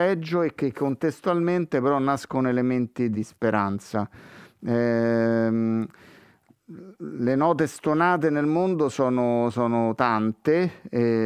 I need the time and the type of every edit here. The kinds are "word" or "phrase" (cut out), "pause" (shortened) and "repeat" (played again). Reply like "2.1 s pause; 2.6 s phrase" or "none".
3.1 s word